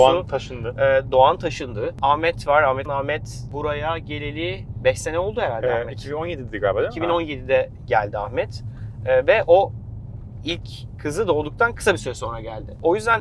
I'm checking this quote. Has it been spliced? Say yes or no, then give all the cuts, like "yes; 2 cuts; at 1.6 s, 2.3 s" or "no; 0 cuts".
yes; 1 cut; at 2.9 s